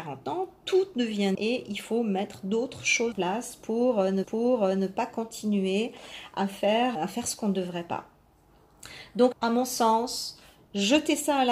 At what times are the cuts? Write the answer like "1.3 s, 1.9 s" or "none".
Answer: 1.3 s, 3.1 s, 4.2 s, 7.0 s, 9.3 s